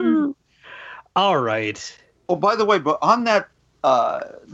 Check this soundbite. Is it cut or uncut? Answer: uncut